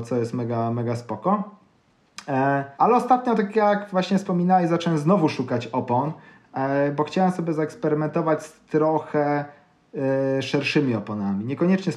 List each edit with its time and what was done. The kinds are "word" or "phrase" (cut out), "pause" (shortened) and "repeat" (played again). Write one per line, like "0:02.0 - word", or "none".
0:02.7 - pause